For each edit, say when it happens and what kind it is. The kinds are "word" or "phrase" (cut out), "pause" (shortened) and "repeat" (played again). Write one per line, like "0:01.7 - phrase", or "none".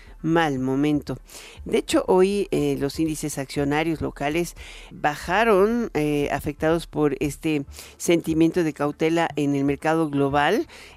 0:04.9 - word